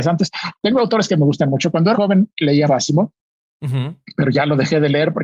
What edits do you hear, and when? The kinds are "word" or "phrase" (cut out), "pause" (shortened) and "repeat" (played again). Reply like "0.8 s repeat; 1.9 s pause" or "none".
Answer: 1.9 s phrase; 2.7 s word